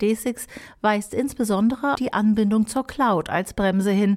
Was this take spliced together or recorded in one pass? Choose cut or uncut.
cut